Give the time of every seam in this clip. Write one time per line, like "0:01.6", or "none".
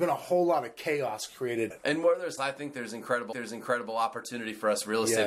0:01.7
0:02.4
0:03.3